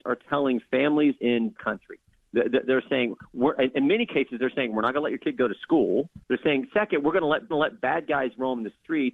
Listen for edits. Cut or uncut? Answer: cut